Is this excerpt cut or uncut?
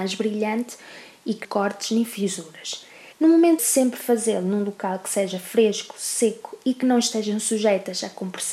cut